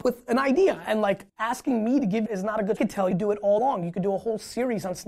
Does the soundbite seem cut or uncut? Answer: cut